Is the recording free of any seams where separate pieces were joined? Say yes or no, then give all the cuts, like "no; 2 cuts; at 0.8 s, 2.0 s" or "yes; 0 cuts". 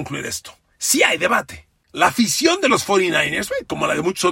yes; 0 cuts